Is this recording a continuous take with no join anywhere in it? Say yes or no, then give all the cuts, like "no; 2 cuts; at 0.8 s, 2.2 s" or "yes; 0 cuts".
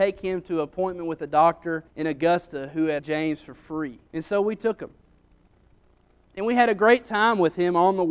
no; 3 cuts; at 1.9 s, 3.0 s, 4.1 s